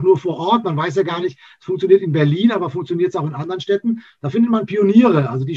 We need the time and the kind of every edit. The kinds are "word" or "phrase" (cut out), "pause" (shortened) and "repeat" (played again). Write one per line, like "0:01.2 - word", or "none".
none